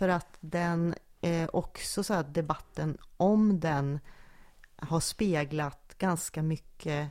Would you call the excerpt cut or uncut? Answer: uncut